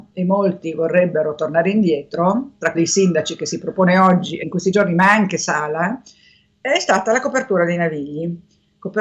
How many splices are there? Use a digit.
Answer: 2